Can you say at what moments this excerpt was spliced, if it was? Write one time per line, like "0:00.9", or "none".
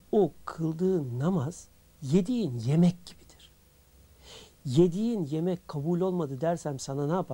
none